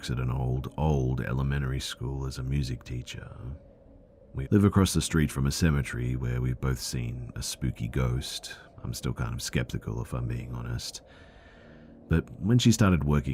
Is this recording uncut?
no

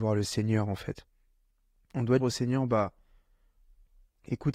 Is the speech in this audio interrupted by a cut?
yes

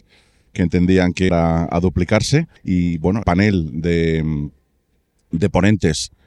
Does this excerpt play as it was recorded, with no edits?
no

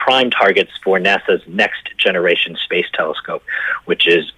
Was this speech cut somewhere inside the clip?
no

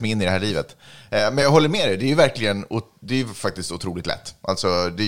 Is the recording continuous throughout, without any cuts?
yes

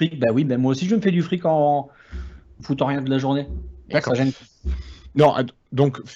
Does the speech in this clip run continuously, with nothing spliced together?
no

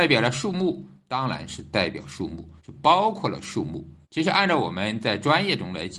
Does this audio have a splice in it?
yes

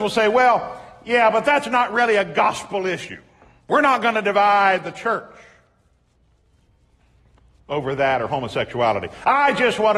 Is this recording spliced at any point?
no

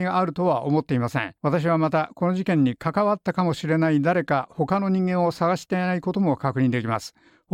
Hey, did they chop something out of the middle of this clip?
yes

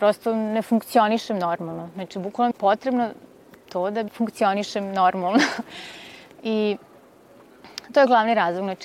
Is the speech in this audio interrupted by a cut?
yes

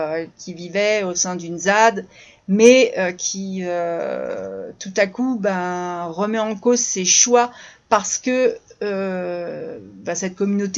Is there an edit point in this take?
no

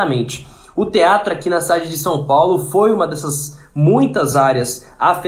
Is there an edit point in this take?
no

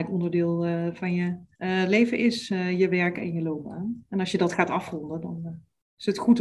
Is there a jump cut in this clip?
yes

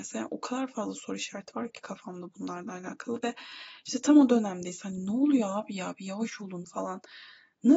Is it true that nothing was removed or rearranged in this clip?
yes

